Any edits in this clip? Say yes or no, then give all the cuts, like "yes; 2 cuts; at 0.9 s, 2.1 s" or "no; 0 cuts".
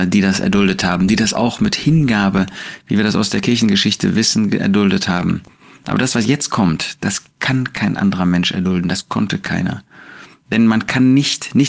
no; 0 cuts